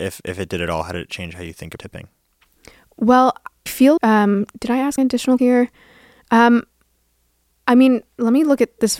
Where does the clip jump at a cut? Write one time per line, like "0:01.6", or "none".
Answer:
0:01.8
0:03.7
0:04.0
0:05.0
0:05.4